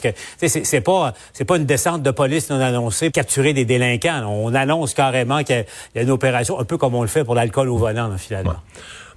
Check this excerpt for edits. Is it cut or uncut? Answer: cut